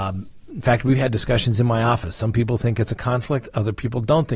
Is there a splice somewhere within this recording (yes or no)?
no